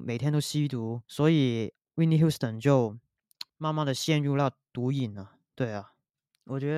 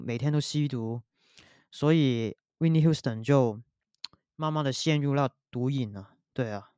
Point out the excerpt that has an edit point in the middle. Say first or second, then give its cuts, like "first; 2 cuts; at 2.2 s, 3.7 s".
first; 2 cuts; at 1.0 s, 3.5 s